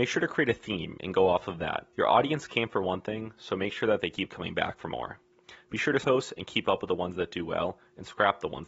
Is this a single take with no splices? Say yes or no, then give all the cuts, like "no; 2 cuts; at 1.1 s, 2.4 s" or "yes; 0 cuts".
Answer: no; 2 cuts; at 1.9 s, 6.0 s